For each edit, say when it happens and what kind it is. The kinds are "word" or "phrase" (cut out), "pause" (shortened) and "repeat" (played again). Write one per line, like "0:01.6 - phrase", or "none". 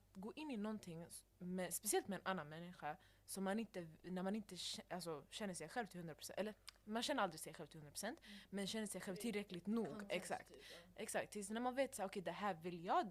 none